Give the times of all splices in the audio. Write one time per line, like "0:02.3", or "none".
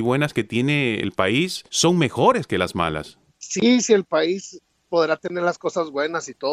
0:01.7
0:03.3